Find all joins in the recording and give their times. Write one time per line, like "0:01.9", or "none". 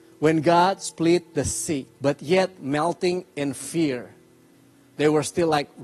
0:01.9
0:02.6